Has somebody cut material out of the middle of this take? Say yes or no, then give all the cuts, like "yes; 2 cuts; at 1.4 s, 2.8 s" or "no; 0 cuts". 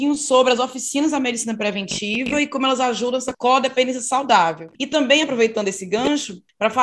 no; 0 cuts